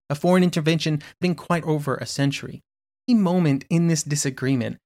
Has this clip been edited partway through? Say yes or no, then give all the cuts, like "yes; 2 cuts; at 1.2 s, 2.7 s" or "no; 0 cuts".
yes; 3 cuts; at 1.2 s, 1.6 s, 3.1 s